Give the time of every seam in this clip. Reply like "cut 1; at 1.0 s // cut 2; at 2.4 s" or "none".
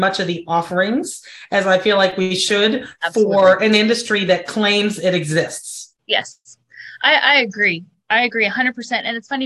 cut 1; at 6.0 s